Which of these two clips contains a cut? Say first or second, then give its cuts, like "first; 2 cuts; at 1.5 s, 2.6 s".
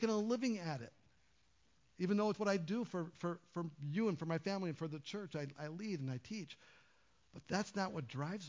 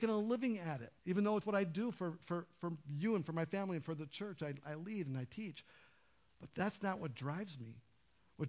second; 1 cut; at 1.0 s